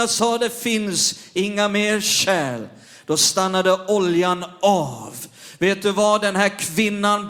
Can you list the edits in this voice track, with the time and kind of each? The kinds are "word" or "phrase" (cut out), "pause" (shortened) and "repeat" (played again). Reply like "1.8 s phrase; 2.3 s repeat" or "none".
none